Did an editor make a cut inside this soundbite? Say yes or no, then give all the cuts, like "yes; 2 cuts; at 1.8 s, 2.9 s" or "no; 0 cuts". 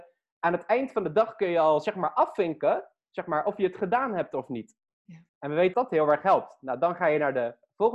yes; 2 cuts; at 5.3 s, 5.7 s